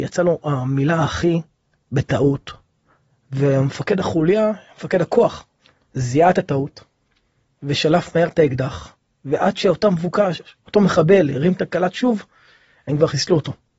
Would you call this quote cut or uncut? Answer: uncut